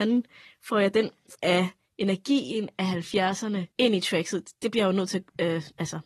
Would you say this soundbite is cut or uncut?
cut